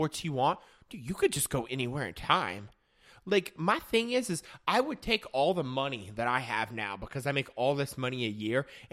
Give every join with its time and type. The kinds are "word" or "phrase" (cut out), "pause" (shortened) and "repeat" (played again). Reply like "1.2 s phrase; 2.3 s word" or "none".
none